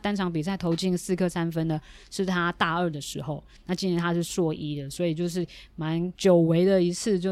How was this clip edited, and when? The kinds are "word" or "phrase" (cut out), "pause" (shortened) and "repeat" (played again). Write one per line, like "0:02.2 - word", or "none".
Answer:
0:06.1 - pause